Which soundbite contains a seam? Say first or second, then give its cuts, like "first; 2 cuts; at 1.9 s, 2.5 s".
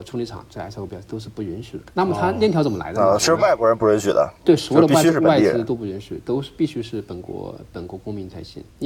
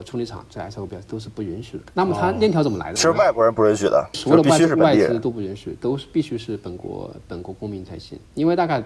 second; 2 cuts; at 3.0 s, 4.1 s